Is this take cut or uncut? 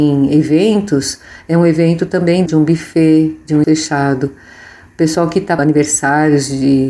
cut